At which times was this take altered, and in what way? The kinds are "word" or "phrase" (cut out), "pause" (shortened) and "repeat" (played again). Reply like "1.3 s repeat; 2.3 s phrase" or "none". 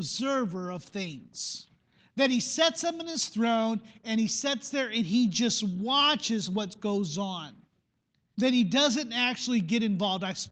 none